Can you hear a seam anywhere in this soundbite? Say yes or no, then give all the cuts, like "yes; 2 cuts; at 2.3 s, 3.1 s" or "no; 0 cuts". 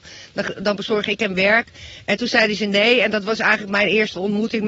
no; 0 cuts